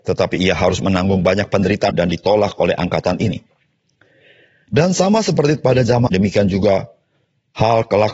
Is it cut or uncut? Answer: cut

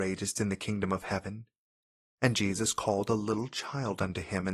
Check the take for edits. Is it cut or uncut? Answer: uncut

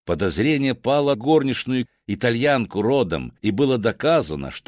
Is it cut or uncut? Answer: cut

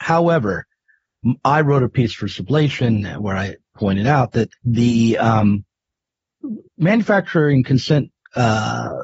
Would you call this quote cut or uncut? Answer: cut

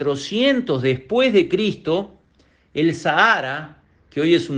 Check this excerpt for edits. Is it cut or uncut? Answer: uncut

